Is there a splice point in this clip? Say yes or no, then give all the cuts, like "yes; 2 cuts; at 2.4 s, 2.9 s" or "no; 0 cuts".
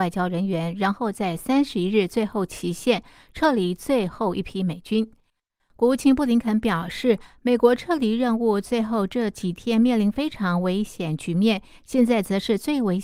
no; 0 cuts